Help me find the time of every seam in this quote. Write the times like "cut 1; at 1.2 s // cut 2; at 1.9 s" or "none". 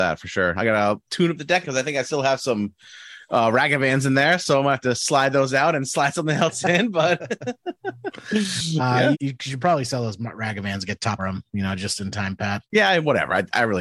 cut 1; at 1.1 s // cut 2; at 1.6 s // cut 3; at 9.1 s // cut 4; at 11.2 s // cut 5; at 12.7 s